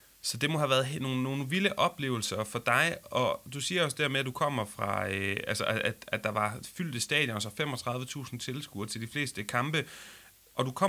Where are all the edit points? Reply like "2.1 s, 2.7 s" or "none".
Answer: none